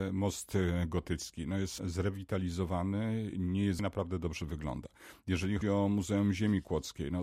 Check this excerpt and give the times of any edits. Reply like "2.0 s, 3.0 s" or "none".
1.8 s, 3.8 s, 5.6 s